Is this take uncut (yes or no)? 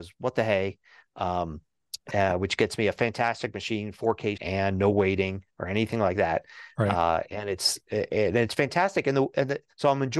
no